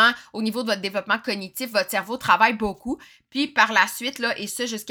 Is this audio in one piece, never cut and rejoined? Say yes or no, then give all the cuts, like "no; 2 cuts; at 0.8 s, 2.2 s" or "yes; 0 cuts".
yes; 0 cuts